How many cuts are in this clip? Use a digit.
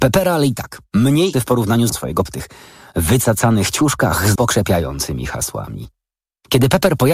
4